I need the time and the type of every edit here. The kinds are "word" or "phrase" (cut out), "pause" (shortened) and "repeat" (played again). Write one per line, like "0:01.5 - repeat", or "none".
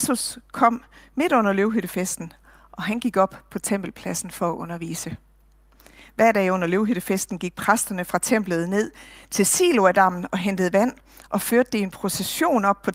none